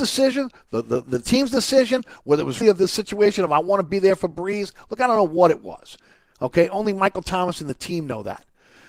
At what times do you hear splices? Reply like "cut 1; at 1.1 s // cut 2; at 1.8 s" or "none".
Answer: cut 1; at 1.0 s // cut 2; at 2.6 s